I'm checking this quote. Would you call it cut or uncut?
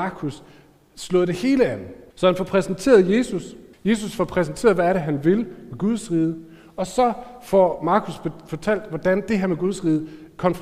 cut